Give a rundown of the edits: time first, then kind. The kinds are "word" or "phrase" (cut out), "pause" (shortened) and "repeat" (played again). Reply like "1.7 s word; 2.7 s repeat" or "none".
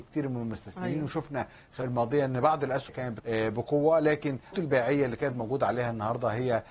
1.8 s word; 2.9 s word; 3.2 s word; 4.5 s word

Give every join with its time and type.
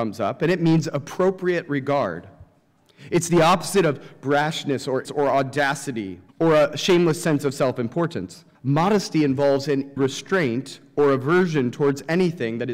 5.0 s word; 6.3 s pause; 8.5 s pause; 10.0 s word

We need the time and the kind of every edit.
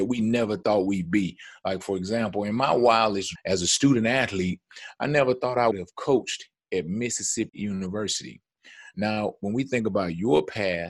3.4 s word; 5.7 s word; 7.5 s word

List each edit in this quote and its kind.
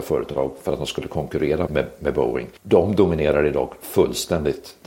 1.7 s word; 2.6 s pause

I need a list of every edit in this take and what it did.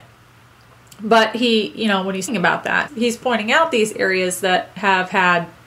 2.3 s word; 2.9 s word

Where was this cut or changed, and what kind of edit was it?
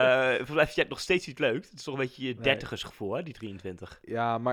none

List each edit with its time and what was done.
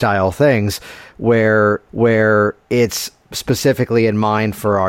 1.9 s repeat

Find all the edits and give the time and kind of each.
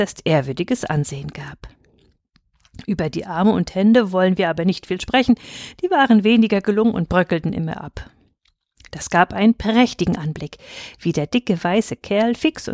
none

